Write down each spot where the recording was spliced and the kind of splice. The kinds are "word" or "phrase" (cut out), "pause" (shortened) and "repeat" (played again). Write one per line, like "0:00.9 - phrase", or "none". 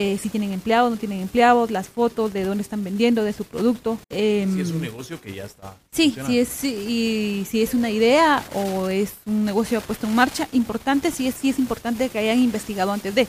0:04.0 - pause
0:11.4 - word